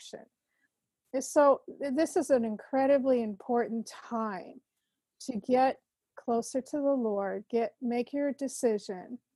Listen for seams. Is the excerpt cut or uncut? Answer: uncut